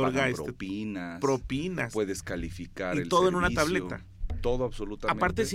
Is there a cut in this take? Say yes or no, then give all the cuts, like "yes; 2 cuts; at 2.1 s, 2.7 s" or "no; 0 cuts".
no; 0 cuts